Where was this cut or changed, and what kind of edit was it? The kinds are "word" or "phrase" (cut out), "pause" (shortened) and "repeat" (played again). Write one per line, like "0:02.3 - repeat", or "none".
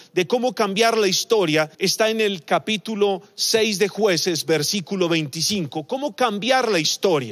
0:01.7 - pause